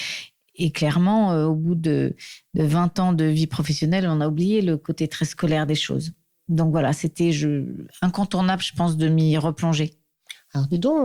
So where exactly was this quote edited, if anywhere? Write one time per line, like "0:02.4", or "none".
none